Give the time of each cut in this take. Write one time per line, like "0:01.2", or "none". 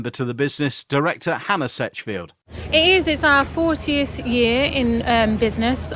none

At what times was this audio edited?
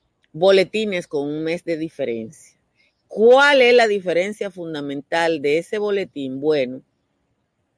none

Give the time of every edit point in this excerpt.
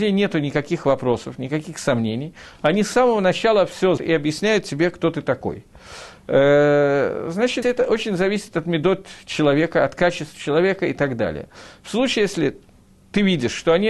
0:04.0
0:07.6

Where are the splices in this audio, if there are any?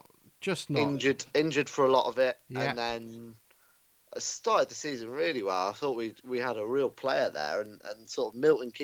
none

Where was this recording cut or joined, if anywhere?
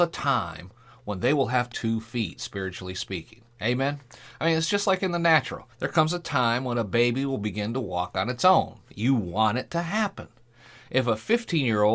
0:01.7
0:05.7

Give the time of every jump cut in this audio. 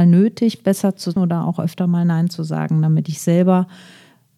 0:01.2

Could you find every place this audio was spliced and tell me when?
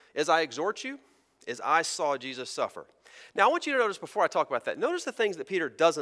none

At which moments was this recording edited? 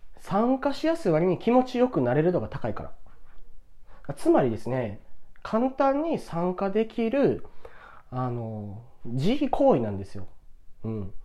0:09.0

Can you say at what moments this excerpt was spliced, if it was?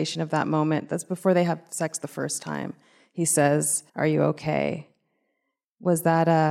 0:03.9

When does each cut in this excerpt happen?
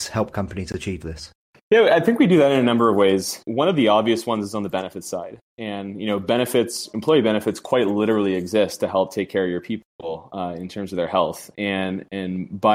none

